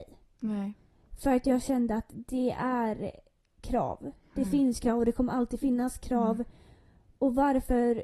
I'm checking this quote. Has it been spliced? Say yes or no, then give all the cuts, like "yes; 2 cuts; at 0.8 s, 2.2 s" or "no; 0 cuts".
no; 0 cuts